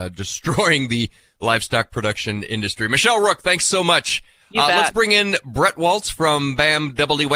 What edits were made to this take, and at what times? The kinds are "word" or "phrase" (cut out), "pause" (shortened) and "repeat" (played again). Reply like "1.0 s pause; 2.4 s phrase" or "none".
none